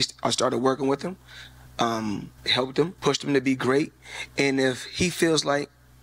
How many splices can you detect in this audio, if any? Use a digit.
2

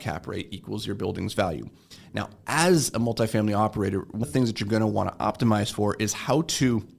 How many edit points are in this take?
1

